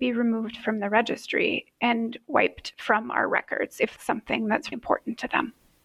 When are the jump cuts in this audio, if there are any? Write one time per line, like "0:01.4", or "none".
0:04.0
0:04.7